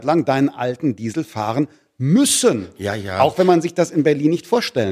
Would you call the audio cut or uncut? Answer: uncut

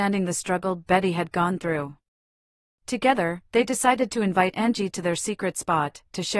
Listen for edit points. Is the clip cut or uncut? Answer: uncut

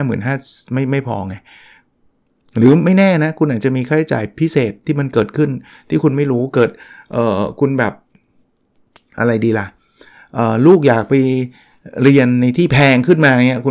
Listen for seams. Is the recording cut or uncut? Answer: uncut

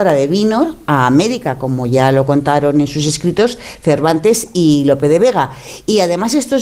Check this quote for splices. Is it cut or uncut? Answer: uncut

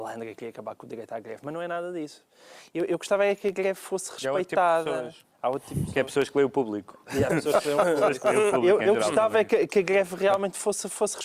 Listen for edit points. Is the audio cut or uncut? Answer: uncut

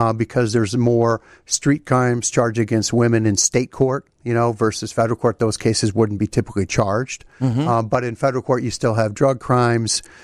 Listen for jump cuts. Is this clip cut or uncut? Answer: uncut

